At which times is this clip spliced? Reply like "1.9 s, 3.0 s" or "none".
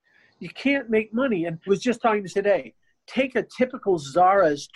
1.7 s, 2.3 s